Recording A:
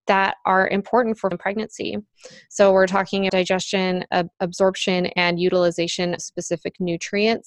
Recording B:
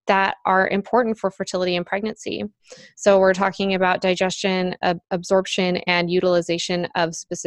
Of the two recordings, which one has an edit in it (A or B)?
A